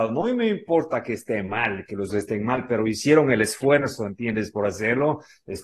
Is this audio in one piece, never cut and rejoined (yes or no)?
no